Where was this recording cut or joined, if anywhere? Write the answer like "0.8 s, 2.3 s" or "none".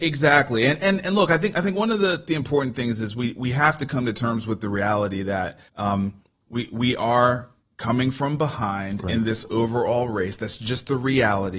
5.7 s